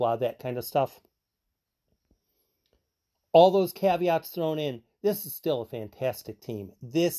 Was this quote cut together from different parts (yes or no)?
no